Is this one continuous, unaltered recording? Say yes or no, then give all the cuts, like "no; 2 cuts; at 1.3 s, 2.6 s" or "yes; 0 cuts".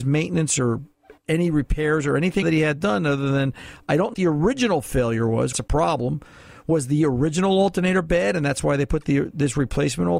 no; 4 cuts; at 1.2 s, 2.4 s, 4.1 s, 5.5 s